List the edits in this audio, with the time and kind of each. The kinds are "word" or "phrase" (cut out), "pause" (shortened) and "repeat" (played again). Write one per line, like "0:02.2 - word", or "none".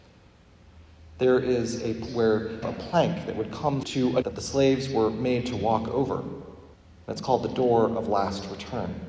0:02.1 - word
0:02.6 - phrase
0:03.8 - word
0:04.2 - word
0:06.7 - pause

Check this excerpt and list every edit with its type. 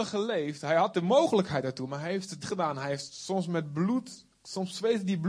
0:02.4 - word

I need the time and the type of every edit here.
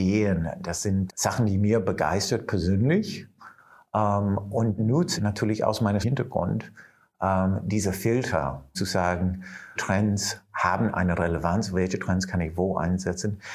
0:01.1 - word
0:04.8 - word
0:05.2 - word
0:06.0 - word
0:08.7 - word
0:09.8 - word

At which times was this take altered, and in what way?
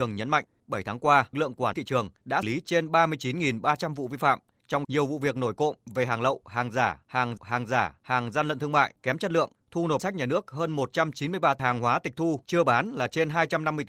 0:01.3 - word
0:01.7 - word
0:02.4 - word
0:04.8 - word
0:07.4 - repeat
0:10.0 - word
0:11.6 - phrase

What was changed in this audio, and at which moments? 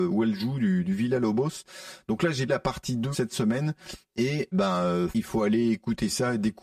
0:02.5 - word
0:03.1 - word
0:04.5 - word
0:05.1 - word

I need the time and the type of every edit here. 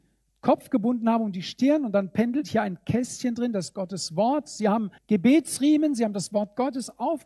0:05.0 - pause

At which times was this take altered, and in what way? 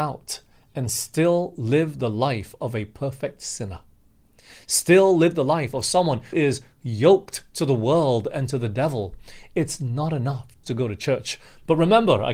0:06.3 - word
0:10.6 - word

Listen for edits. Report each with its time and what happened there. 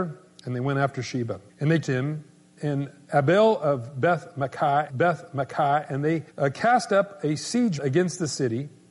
0:01.5 - pause
0:01.8 - phrase
0:02.6 - word
0:04.9 - repeat
0:06.3 - pause
0:07.8 - word

